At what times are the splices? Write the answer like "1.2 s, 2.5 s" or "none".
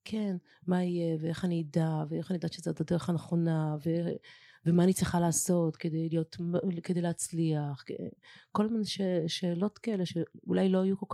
none